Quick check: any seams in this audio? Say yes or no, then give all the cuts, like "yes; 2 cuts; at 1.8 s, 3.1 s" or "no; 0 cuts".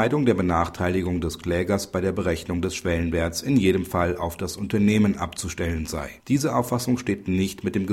yes; 1 cut; at 6.2 s